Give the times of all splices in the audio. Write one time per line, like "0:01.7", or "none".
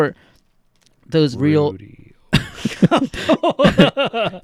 0:01.3